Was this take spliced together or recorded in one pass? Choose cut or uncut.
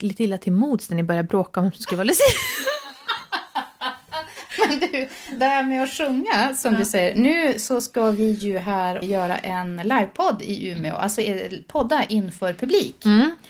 uncut